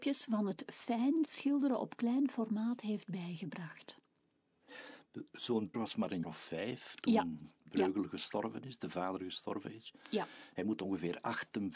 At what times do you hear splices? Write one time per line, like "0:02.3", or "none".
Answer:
0:01.2
0:05.7
0:06.2